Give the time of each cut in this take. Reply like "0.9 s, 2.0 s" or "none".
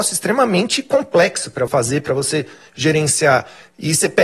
1.7 s